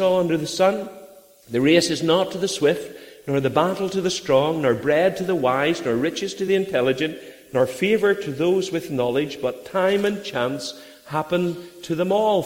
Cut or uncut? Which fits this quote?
uncut